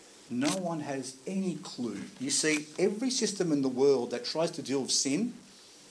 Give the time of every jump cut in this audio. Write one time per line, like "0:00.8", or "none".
none